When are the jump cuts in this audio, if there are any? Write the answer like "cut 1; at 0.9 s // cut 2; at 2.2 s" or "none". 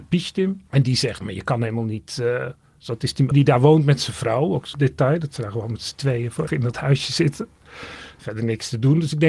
cut 1; at 1.2 s // cut 2; at 3.3 s // cut 3; at 4.7 s // cut 4; at 6.5 s

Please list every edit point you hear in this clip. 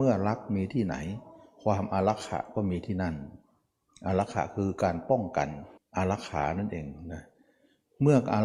cut 1; at 5.8 s

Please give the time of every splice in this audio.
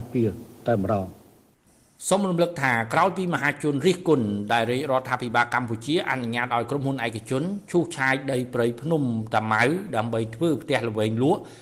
none

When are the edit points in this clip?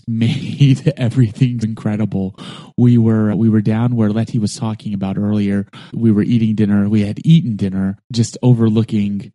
cut 1; at 1.6 s // cut 2; at 3.3 s

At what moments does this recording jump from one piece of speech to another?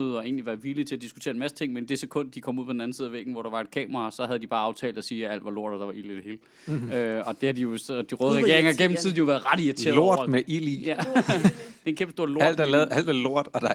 none

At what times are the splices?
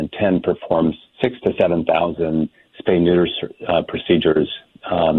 none

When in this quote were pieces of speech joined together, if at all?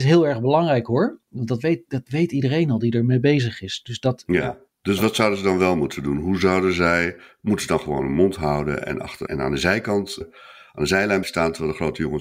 cut 1; at 9.3 s // cut 2; at 10.2 s // cut 3; at 11.2 s

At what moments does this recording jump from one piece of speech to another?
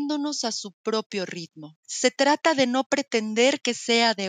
cut 1; at 1.8 s

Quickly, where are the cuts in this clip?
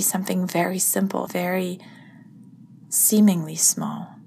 cut 1; at 1.3 s // cut 2; at 2.8 s

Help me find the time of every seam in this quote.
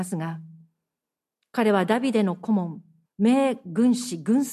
cut 1; at 3.0 s

